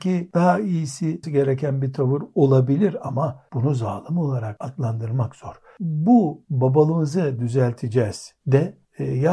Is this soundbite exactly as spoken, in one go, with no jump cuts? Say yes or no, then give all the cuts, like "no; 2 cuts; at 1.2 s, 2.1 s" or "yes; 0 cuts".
no; 1 cut; at 1.2 s